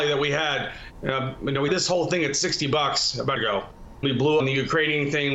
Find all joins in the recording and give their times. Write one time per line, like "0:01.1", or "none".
0:01.7
0:03.4
0:04.0
0:04.4